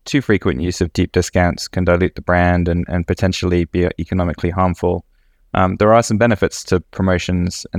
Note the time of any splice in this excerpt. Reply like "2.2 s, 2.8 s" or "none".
none